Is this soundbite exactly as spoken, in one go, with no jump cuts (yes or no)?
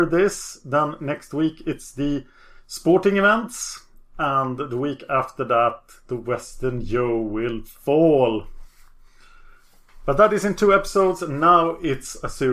yes